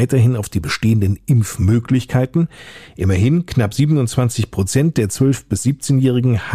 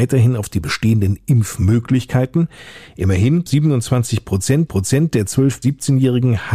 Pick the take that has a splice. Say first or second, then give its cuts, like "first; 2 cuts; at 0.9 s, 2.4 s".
second; 3 cuts; at 3.5 s, 4.7 s, 5.6 s